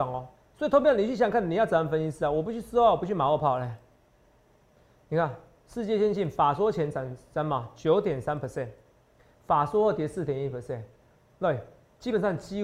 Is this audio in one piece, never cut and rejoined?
yes; 0 cuts

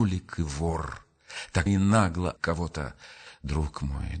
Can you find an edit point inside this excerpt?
yes; 2 cuts; at 1.7 s, 2.4 s

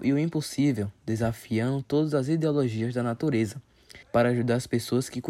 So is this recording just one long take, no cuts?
no; 1 cut; at 4.0 s

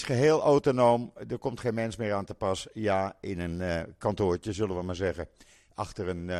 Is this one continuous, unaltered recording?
yes; 0 cuts

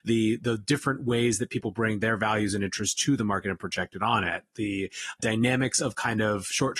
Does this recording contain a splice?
yes; 1 cut; at 5.2 s

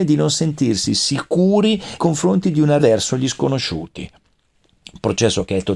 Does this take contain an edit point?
yes; 2 cuts; at 2.0 s, 2.8 s

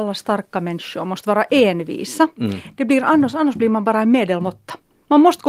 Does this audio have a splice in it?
no; 0 cuts

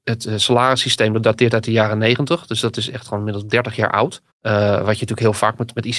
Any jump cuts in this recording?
yes; 1 cut; at 4.3 s

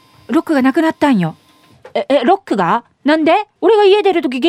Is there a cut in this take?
yes; 1 cut; at 3.6 s

